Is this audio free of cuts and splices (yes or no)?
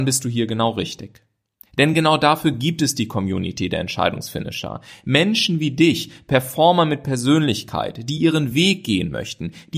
yes